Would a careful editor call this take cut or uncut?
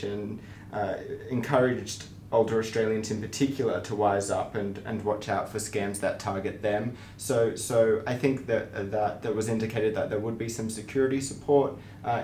uncut